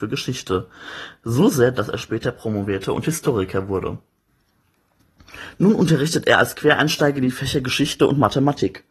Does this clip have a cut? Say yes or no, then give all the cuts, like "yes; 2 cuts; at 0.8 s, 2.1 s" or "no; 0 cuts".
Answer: no; 0 cuts